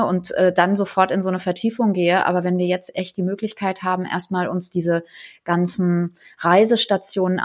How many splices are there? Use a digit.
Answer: 0